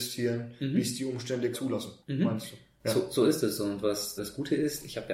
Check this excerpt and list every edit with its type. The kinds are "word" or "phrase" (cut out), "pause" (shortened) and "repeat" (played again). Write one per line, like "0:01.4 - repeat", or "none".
0:01.5 - word
0:02.0 - pause
0:04.2 - word